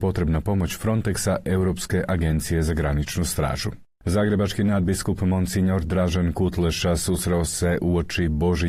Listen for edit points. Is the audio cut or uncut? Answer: uncut